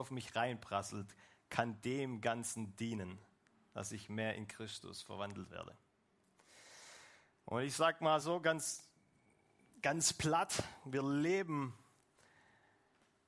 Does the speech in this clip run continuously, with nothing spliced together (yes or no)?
yes